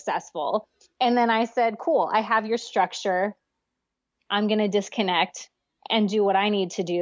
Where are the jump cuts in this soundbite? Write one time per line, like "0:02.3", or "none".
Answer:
none